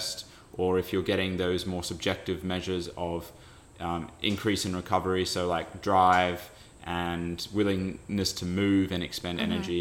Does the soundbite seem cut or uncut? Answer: uncut